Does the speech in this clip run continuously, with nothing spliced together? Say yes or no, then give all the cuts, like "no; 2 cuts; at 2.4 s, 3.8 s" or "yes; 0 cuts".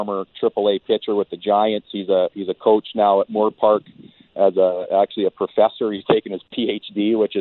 yes; 0 cuts